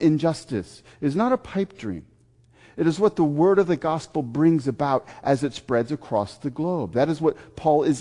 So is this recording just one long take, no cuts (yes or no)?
yes